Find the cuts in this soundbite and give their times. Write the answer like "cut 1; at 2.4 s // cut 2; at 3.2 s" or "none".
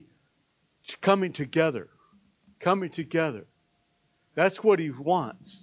none